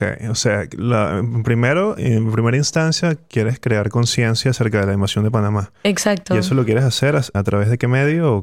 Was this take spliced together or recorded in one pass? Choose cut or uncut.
cut